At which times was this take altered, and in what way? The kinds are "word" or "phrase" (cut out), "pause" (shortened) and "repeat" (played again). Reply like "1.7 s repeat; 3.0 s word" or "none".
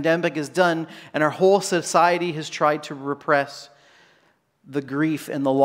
none

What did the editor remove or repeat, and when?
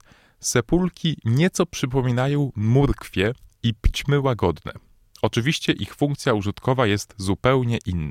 none

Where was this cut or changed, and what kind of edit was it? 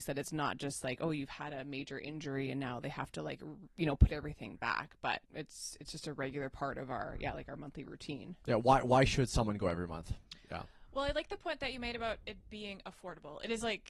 5.2 s pause

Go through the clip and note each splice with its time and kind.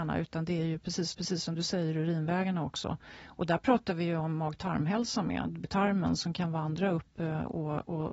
1.1 s repeat; 5.6 s phrase

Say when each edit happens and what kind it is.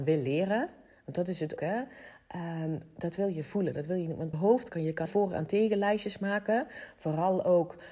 1.6 s word; 4.3 s word; 4.7 s word; 5.1 s word

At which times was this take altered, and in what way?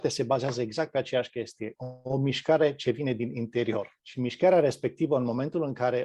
none

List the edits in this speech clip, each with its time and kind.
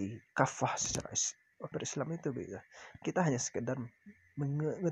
1.7 s word; 3.0 s word

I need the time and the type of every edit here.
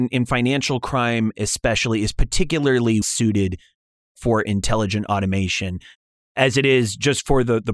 3.0 s word

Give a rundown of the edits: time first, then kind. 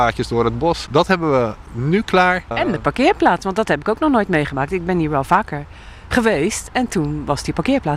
none

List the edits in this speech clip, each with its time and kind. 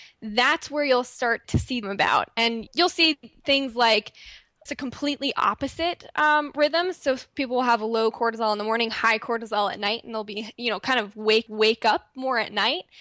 1.4 s word; 1.8 s phrase; 2.7 s word; 4.7 s word; 11.5 s repeat

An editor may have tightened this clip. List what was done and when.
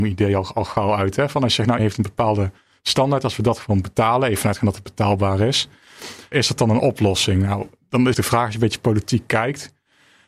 1.8 s word; 6.3 s word; 8.1 s word

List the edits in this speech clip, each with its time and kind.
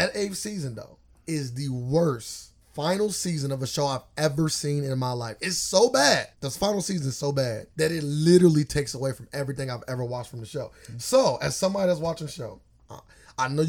1.1 s pause; 2.6 s pause; 6.3 s pause; 7.7 s pause

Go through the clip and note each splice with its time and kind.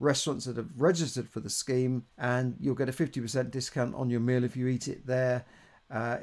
2.1 s pause

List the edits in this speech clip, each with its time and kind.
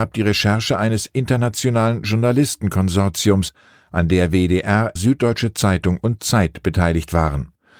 5.0 s word

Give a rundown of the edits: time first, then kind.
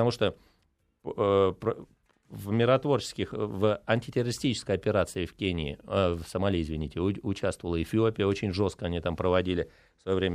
none

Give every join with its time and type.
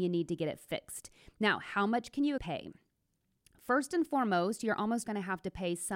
2.4 s phrase; 5.0 s word

